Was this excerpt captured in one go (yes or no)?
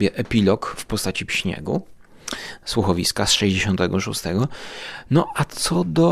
no